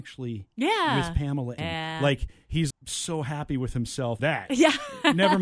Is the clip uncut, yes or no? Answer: no